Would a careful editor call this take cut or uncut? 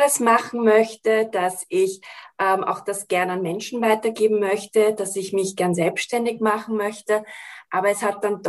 uncut